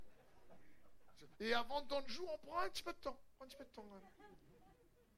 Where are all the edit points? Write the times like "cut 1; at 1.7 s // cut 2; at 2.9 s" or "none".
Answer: cut 1; at 1.3 s // cut 2; at 2.0 s